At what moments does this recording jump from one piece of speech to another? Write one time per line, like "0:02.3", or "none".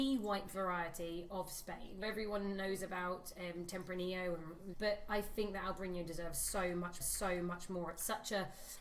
0:02.0
0:04.7
0:07.0